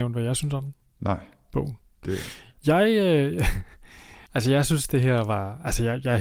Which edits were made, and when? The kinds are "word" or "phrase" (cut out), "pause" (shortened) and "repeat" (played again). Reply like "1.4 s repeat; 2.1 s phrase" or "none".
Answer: 4.3 s pause